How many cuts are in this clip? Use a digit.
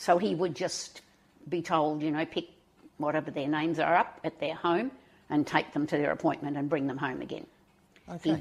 0